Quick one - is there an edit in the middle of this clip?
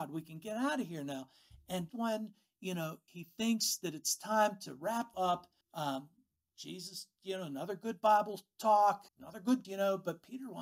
yes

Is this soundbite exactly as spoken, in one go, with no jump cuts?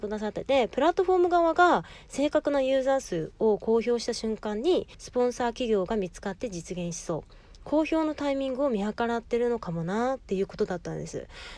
no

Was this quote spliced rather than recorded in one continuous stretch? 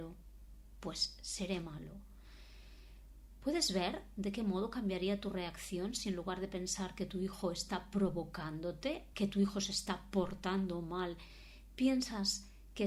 yes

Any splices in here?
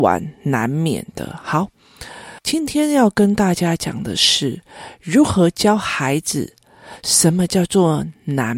yes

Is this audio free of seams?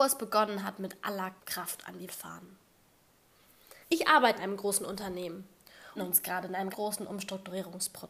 no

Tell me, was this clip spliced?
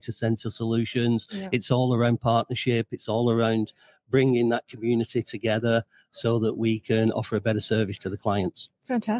no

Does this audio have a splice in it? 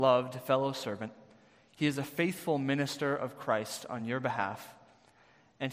no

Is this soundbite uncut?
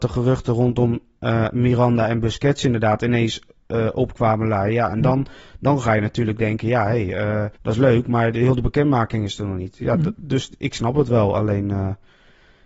no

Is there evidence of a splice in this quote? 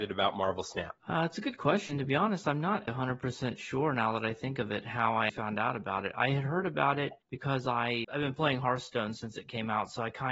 yes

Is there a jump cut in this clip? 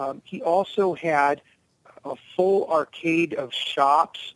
no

